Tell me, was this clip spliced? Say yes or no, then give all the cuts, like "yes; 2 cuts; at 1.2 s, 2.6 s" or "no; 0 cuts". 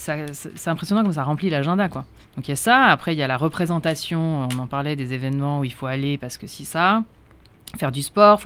yes; 1 cut; at 2.2 s